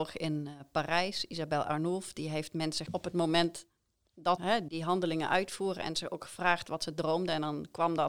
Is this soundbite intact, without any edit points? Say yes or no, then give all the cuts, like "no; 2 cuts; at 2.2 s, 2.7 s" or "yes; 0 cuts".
no; 3 cuts; at 2.9 s, 4.4 s, 4.7 s